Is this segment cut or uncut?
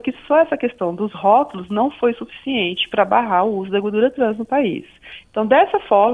uncut